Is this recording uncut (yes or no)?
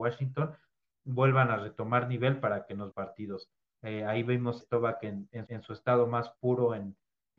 no